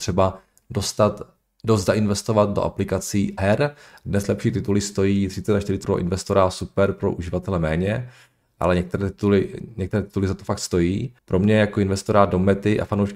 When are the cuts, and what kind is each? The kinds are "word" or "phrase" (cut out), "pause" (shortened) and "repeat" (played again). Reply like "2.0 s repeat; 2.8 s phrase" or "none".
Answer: 3.4 s word; 5.8 s word; 11.2 s pause